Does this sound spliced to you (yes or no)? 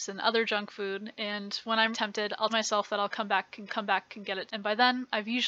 yes